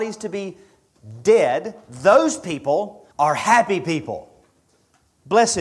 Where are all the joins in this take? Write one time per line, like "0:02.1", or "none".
0:03.1